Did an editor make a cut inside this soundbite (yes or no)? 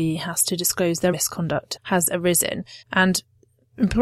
yes